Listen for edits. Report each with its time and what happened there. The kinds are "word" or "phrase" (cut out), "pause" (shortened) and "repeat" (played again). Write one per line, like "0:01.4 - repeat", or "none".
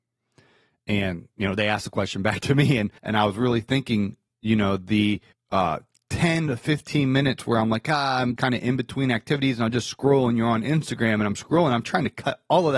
0:03.0 - pause
0:05.3 - pause
0:08.4 - word